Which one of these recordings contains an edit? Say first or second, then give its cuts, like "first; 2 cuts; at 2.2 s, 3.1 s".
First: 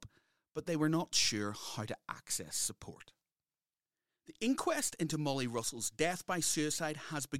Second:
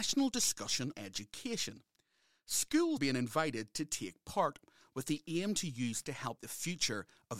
second; 4 cuts; at 0.9 s, 3.0 s, 6.0 s, 6.4 s